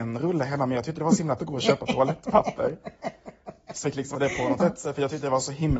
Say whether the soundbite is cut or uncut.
cut